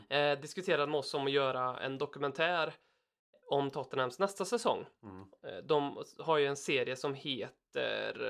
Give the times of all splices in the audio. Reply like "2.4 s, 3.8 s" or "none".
none

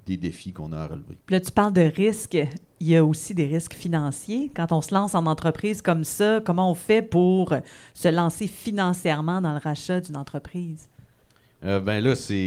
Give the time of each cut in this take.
1.2 s

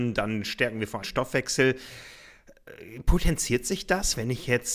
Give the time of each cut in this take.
1.0 s

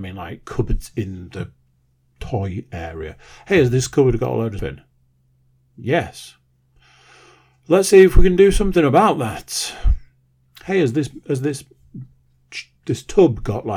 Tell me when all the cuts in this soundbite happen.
4.6 s

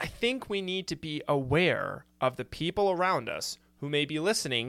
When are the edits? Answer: none

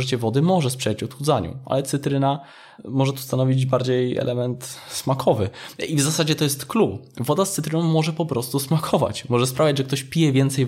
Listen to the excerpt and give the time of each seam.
none

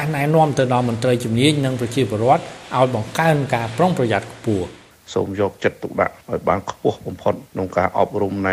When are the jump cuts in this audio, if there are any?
6.2 s, 7.5 s

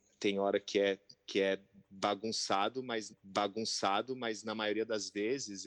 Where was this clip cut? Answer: 3.1 s

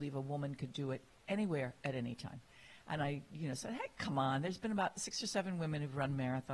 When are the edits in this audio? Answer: none

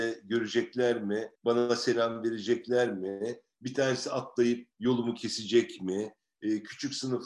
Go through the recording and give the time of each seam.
1.4 s, 4.7 s

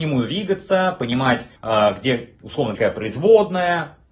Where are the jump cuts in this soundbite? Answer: 1.6 s, 2.7 s

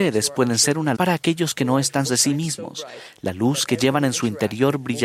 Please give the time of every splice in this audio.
0.9 s, 2.0 s

